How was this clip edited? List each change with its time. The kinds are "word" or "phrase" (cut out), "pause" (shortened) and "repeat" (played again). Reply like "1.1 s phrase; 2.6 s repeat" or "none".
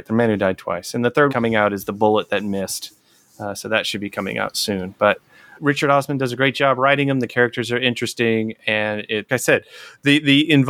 1.3 s word; 5.5 s word; 9.3 s word